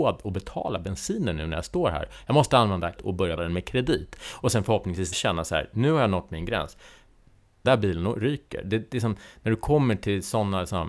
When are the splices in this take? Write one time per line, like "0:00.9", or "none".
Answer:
0:03.0
0:03.4
0:05.1
0:07.6